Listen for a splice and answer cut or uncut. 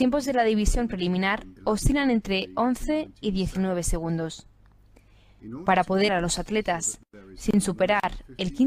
cut